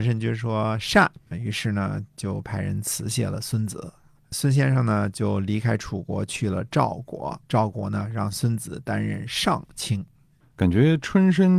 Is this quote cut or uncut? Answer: cut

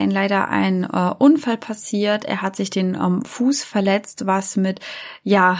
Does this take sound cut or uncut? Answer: uncut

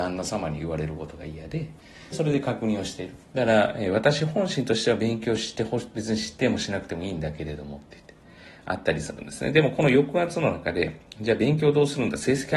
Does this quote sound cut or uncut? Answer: cut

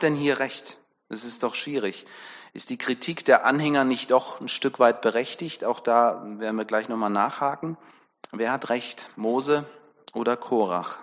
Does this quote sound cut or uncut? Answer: cut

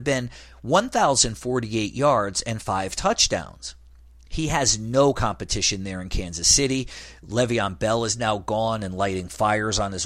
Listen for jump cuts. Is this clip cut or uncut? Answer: uncut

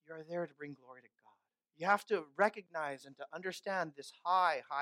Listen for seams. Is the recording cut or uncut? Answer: cut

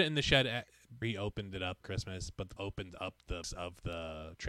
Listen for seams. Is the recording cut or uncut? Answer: cut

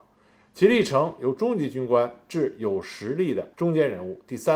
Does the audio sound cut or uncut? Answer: cut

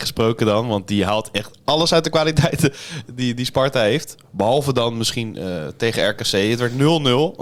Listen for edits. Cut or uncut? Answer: cut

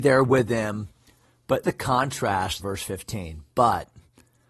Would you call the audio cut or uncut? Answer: cut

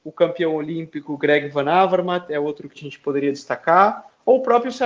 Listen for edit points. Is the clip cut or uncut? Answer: cut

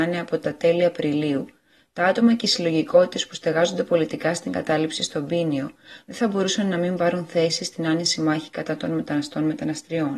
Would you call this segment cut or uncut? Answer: uncut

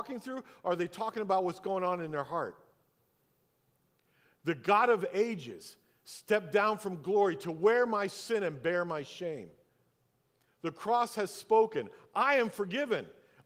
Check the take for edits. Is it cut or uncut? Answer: uncut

